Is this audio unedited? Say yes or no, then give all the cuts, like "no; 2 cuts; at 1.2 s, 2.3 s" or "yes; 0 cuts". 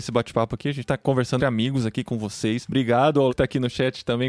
no; 3 cuts; at 1.4 s, 2.1 s, 3.3 s